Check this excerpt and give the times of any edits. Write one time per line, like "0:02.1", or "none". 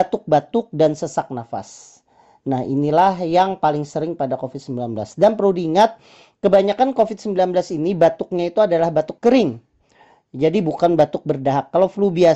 none